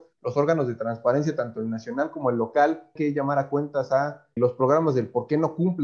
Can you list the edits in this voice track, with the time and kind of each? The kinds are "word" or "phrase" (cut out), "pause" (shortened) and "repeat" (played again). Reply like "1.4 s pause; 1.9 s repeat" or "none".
3.0 s word; 4.4 s word